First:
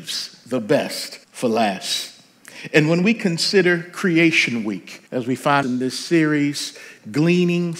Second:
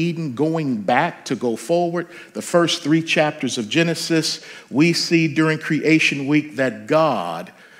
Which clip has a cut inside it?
first; 3 cuts; at 1.2 s, 5.1 s, 5.6 s

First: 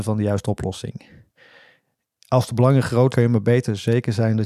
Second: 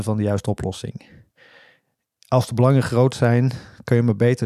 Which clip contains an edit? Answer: first; 1 cut; at 3.1 s

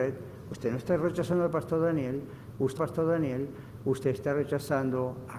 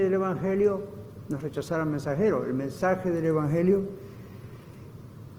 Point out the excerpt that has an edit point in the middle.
first; 1 cut; at 2.8 s

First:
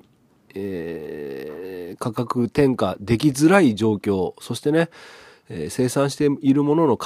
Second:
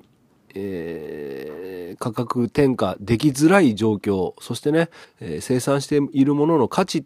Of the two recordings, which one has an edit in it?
second; 1 cut; at 5.0 s

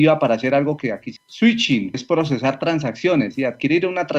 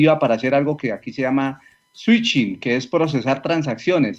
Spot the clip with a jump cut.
first; 2 cuts; at 1.2 s, 1.9 s

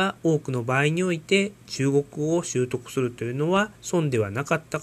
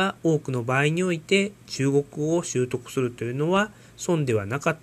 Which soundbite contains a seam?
first; 1 cut; at 3.7 s

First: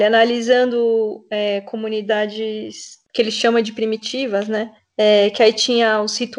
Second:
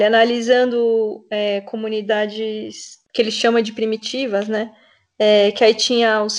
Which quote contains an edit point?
first; 1 cut; at 4.8 s

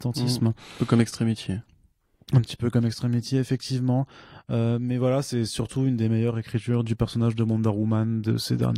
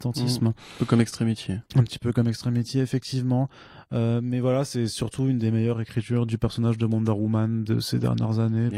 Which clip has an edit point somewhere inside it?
second; 1 cut; at 1.7 s

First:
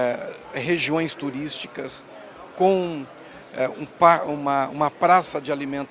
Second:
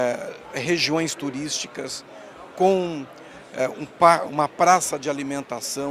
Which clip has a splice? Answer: second; 1 cut; at 4.3 s

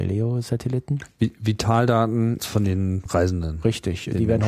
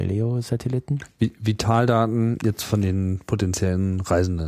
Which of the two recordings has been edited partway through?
first; 2 cuts; at 2.4 s, 3.1 s

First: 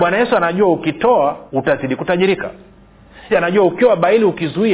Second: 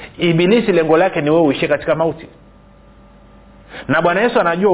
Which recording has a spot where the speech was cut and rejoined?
first; 2 cuts; at 1.5 s, 3.3 s

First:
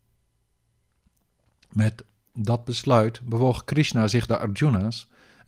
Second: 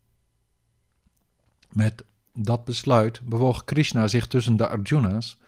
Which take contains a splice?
first; 1 cut; at 4.3 s

